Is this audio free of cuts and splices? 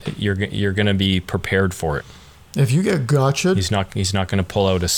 yes; 0 cuts

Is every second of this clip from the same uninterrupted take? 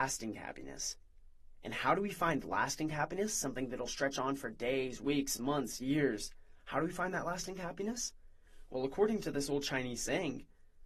yes; 0 cuts

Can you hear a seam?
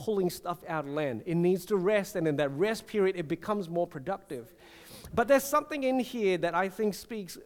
no; 0 cuts

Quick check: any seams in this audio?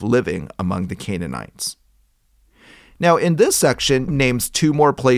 yes; 1 cut; at 4.1 s

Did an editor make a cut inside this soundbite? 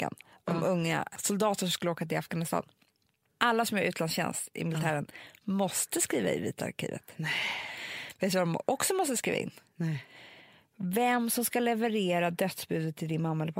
no; 0 cuts

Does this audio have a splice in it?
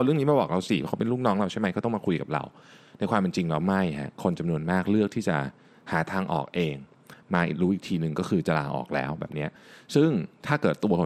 no; 0 cuts

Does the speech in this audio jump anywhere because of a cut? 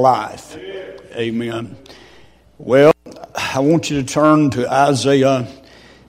no; 0 cuts

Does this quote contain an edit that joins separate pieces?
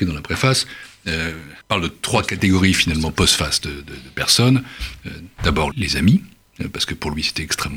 yes; 2 cuts; at 1.6 s, 5.7 s

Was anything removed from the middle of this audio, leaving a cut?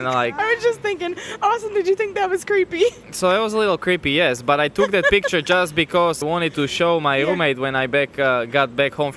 yes; 1 cut; at 6.2 s

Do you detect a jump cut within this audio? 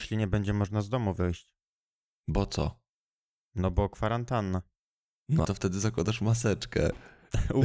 yes; 1 cut; at 5.4 s

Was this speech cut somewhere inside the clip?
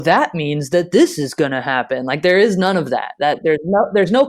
no; 0 cuts

